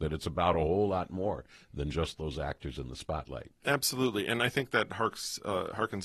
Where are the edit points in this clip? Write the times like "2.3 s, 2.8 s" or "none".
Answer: 4.9 s